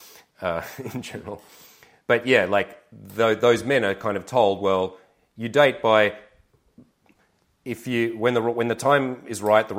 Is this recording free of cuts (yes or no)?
yes